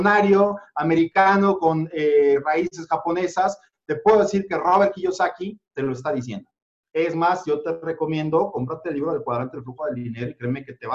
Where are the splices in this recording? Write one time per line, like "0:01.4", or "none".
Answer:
none

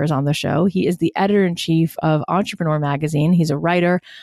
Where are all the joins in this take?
none

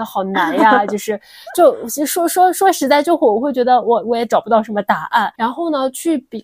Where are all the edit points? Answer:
0:05.3

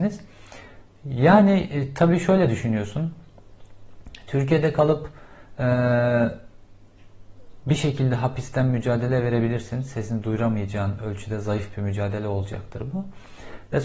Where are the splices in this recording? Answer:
none

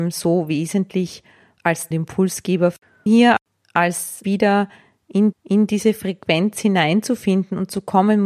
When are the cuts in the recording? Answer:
0:01.9
0:03.1
0:04.2
0:05.3

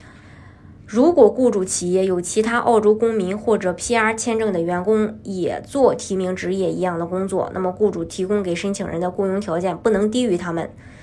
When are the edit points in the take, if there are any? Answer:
none

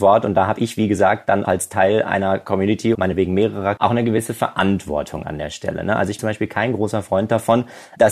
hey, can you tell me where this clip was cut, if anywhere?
0:01.4
0:02.9
0:03.8
0:06.2

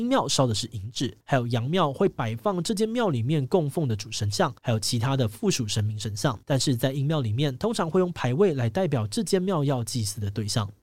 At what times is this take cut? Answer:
0:01.2
0:04.6
0:06.4

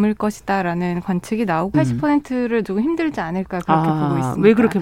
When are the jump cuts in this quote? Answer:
0:01.7
0:02.6

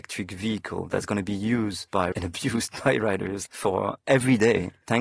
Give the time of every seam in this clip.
0:02.1
0:03.5

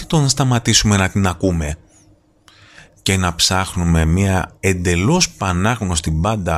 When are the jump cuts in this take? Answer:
none

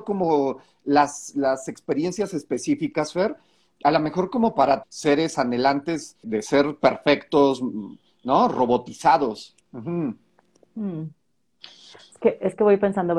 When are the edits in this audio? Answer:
0:04.8
0:06.2
0:09.6

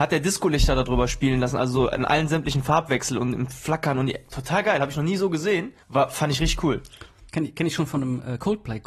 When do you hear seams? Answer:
0:05.8
0:07.3

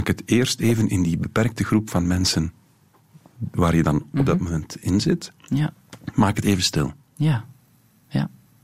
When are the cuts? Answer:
none

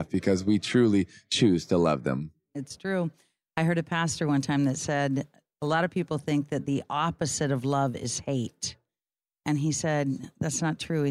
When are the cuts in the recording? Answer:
none

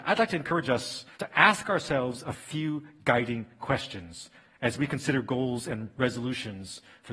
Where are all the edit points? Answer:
0:01.1

